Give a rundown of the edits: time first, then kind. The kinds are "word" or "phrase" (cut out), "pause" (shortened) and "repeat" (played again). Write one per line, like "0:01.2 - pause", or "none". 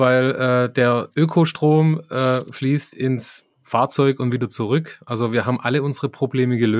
none